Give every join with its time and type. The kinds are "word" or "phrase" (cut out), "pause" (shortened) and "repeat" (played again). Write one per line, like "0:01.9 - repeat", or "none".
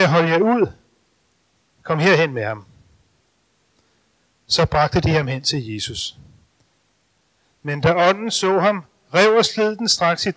none